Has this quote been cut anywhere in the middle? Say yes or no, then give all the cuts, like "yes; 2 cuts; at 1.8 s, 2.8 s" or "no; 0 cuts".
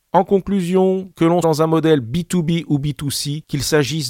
yes; 1 cut; at 1.4 s